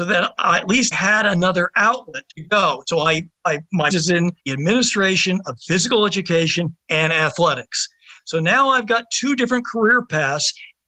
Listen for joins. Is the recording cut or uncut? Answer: cut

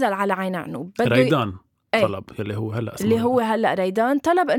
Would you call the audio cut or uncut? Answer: uncut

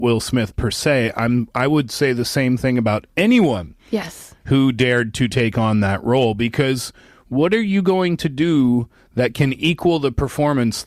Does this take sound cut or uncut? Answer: uncut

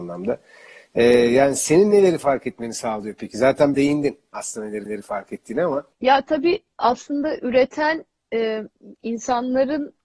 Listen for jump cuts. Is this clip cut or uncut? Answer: cut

